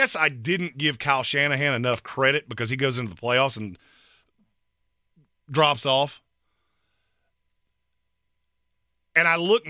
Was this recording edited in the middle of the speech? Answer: no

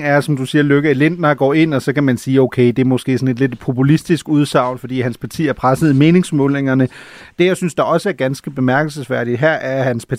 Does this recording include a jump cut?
no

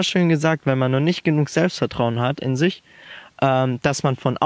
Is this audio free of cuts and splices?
yes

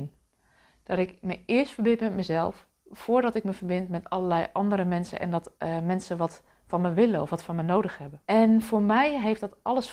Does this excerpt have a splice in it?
yes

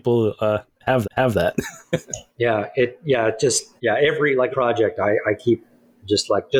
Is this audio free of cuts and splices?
no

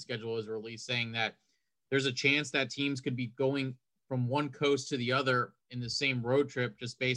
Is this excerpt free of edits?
yes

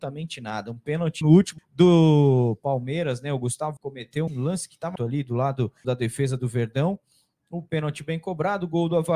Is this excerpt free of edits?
no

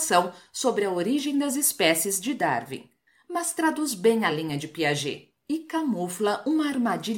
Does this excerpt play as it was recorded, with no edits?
yes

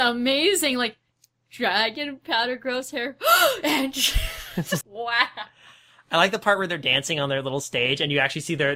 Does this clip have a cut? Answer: yes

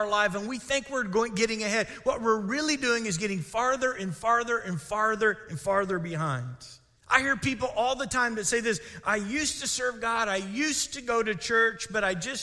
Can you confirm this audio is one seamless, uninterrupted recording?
no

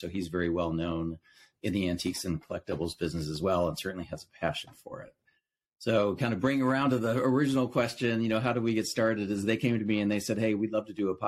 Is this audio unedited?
yes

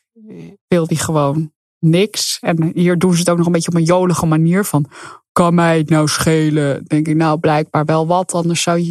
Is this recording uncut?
yes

